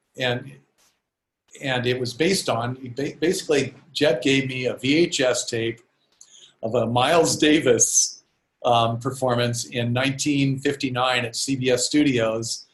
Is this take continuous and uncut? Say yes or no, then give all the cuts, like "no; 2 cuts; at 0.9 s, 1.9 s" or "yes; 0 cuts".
yes; 0 cuts